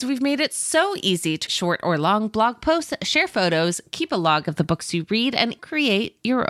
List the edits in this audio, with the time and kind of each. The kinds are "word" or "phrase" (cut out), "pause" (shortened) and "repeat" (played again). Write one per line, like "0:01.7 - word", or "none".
0:01.5 - word
0:05.6 - word